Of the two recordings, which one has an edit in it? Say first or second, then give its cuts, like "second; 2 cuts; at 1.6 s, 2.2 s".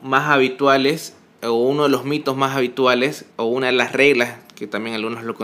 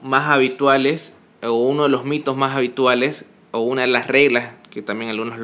first; 1 cut; at 3.3 s